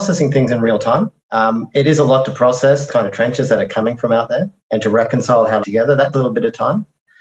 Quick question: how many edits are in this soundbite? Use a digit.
5